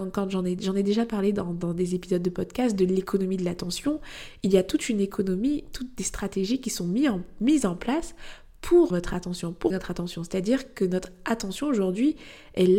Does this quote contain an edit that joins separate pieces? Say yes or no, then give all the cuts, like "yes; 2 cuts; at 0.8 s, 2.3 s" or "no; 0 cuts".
yes; 2 cuts; at 8.9 s, 9.7 s